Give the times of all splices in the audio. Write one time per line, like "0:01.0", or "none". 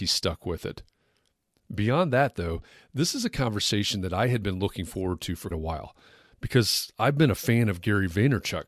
0:05.5